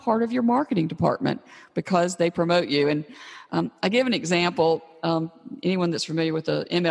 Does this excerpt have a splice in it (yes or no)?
no